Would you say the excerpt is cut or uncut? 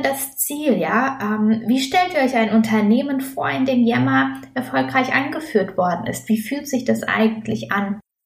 uncut